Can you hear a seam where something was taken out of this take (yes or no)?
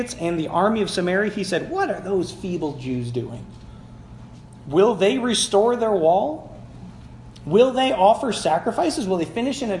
no